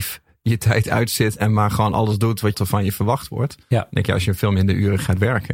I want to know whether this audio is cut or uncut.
cut